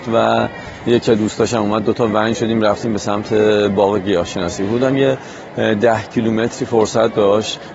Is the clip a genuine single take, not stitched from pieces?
yes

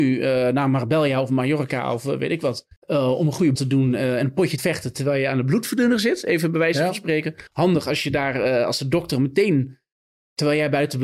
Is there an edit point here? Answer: yes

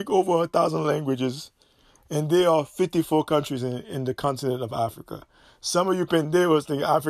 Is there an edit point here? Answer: no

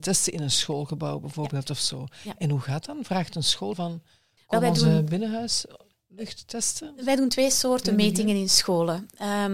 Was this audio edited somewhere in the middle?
yes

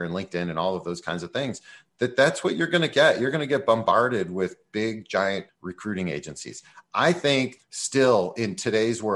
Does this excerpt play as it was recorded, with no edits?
no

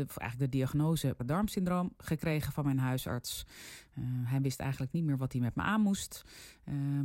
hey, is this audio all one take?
no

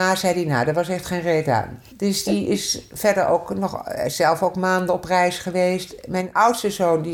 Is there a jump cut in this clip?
no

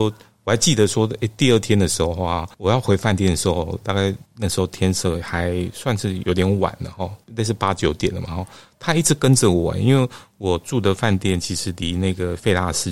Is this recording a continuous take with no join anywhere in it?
no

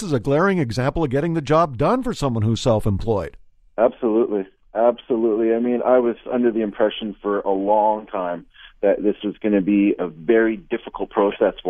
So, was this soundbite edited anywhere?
no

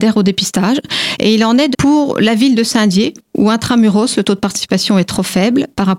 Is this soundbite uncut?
no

